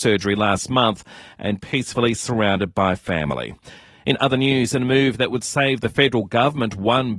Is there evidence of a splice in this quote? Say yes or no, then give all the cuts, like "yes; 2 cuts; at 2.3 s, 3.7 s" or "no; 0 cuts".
yes; 1 cut; at 1.6 s